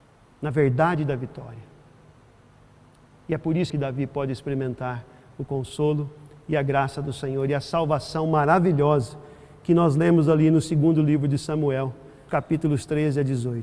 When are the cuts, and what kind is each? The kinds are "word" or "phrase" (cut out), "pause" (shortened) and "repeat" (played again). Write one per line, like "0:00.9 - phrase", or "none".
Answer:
0:03.7 - word
0:12.3 - word

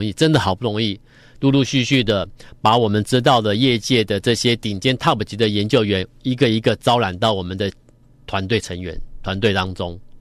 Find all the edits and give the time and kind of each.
none

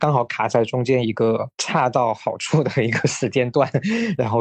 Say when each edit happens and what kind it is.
0:01.5 - pause

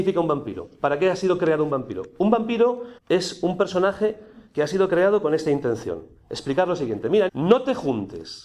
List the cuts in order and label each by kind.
0:03.0 - pause
0:07.3 - word

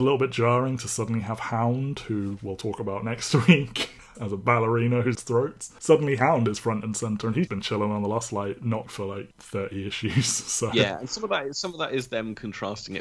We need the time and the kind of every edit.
0:04.1 - word
0:05.1 - word
0:07.5 - word
0:08.9 - word

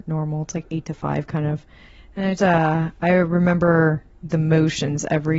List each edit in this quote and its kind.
0:02.4 - word
0:04.3 - phrase

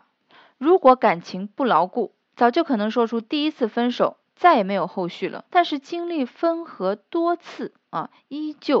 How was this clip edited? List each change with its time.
0:02.2 - pause
0:04.2 - pause
0:05.5 - pause

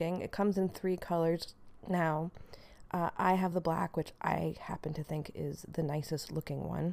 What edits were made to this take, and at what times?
none

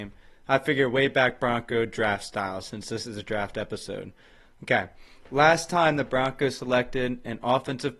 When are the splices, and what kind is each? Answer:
none

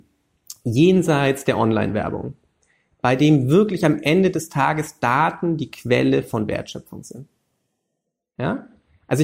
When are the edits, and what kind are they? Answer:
none

